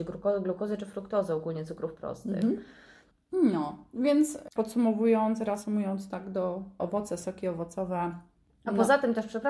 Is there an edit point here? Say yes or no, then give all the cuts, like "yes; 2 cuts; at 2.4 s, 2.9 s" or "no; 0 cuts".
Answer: yes; 2 cuts; at 4.6 s, 6.8 s